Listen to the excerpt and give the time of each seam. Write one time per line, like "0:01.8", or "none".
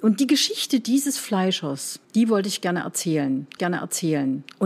0:02.0
0:03.6